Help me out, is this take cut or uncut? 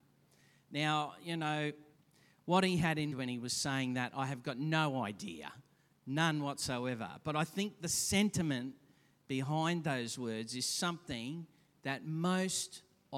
cut